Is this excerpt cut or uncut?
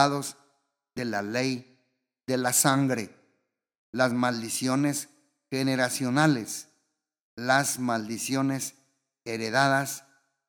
uncut